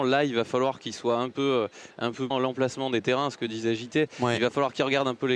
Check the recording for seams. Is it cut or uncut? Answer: cut